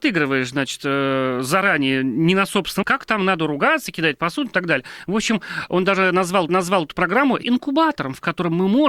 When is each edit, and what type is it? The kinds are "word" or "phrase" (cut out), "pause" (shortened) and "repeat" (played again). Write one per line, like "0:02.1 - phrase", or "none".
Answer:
0:02.8 - word
0:06.5 - repeat
0:07.4 - word